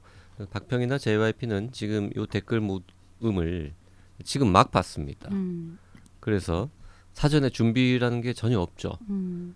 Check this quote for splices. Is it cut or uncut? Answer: uncut